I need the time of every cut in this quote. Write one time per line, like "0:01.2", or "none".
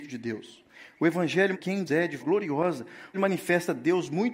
0:01.5
0:01.9
0:02.2
0:03.1